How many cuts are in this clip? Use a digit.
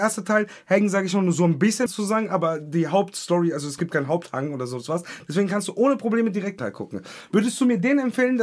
2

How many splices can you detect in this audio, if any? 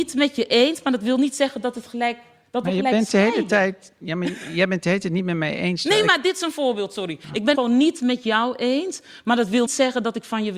2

